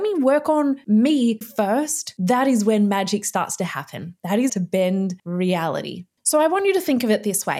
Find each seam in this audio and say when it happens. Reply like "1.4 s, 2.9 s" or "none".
1.4 s, 4.5 s

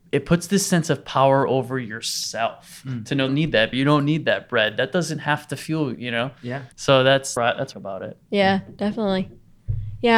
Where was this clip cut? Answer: 3.3 s, 3.7 s, 5.9 s, 6.7 s, 7.4 s, 7.7 s, 8.2 s

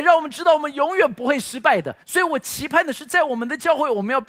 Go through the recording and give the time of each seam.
2.0 s

